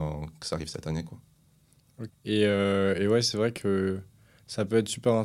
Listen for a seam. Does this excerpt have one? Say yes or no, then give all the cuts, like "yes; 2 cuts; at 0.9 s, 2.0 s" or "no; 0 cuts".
yes; 1 cut; at 2.1 s